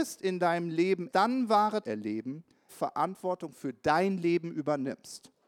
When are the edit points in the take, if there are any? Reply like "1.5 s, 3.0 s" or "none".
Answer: 1.1 s, 1.8 s, 2.7 s